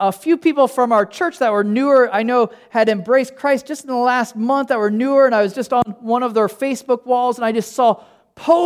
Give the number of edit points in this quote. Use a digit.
0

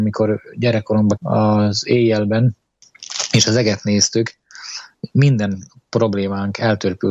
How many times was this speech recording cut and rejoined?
1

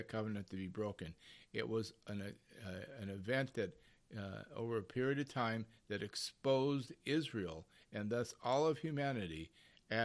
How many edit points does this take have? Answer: 0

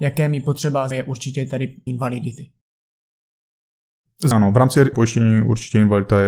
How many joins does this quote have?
4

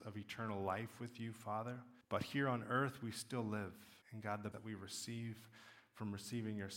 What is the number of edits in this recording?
3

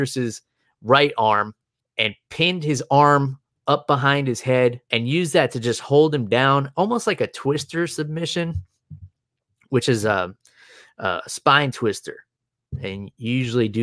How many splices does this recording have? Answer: 2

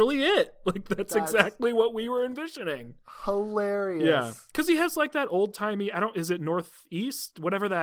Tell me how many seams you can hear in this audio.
0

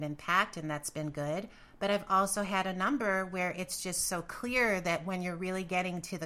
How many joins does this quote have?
0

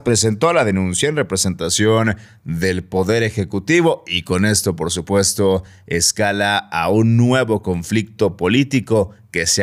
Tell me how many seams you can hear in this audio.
0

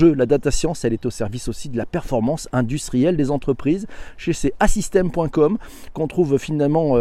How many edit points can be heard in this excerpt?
0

